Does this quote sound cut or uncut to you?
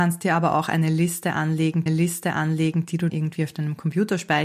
cut